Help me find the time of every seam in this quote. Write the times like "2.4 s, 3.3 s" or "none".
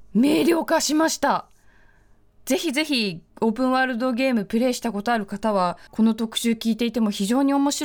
3.3 s, 5.9 s